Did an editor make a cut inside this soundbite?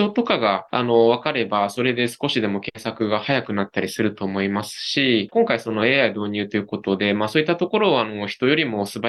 yes; 1 cut; at 5.3 s

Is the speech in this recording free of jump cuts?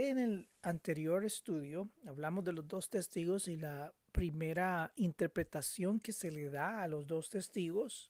no; 1 cut; at 4.0 s

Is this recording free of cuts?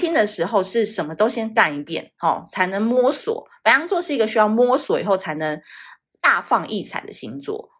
yes; 0 cuts

